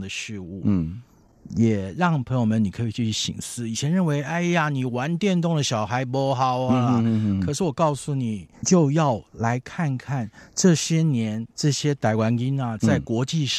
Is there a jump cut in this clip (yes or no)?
yes